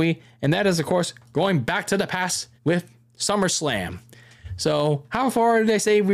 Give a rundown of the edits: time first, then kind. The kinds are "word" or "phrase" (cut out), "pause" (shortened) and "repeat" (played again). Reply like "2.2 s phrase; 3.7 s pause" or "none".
2.6 s pause